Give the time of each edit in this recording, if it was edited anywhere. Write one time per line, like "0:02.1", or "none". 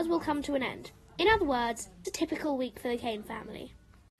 0:02.0